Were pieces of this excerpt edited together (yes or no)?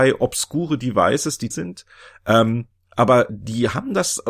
yes